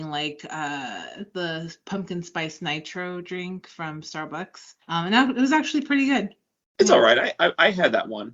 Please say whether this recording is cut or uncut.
cut